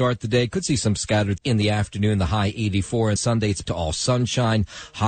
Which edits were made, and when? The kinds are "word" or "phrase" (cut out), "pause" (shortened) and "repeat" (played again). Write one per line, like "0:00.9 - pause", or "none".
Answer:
0:01.4 - word
0:03.2 - word
0:03.6 - word